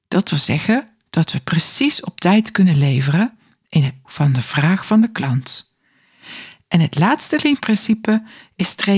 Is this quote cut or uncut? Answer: cut